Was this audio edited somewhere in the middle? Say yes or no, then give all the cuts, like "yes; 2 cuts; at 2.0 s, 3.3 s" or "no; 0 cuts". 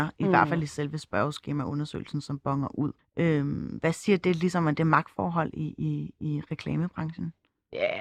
yes; 1 cut; at 3.0 s